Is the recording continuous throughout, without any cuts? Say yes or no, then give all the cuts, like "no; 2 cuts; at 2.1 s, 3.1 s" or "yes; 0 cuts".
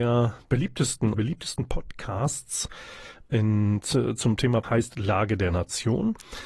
no; 2 cuts; at 1.1 s, 4.6 s